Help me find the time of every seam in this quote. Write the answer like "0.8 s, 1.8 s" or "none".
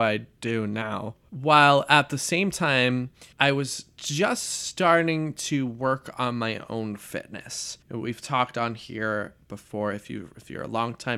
3.3 s, 7.8 s